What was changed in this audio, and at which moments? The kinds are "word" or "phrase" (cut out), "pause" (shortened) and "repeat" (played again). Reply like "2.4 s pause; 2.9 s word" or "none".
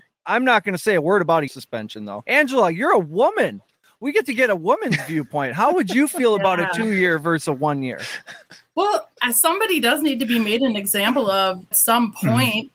1.5 s word; 11.7 s word